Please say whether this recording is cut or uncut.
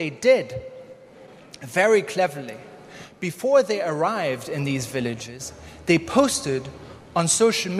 uncut